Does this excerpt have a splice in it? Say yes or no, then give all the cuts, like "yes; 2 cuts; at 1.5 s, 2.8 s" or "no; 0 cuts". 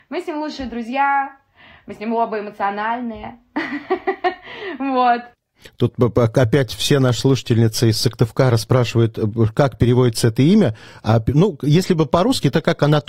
no; 0 cuts